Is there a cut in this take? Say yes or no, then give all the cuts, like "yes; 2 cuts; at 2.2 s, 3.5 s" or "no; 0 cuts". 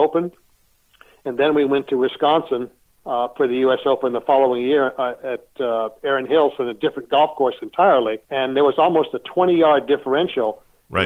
yes; 2 cuts; at 2.9 s, 8.2 s